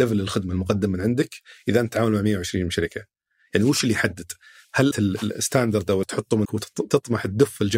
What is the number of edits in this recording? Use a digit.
3